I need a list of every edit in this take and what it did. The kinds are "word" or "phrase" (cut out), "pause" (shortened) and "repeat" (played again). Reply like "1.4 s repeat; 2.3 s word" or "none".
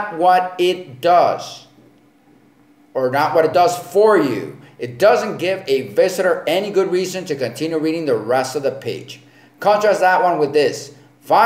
none